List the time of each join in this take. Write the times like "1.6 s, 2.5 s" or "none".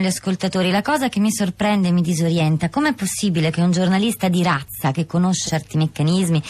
5.5 s